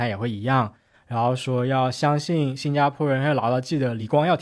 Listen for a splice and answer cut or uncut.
uncut